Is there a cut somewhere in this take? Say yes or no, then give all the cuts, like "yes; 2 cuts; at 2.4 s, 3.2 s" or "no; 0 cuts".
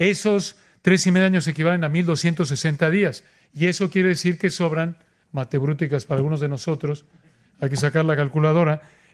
no; 0 cuts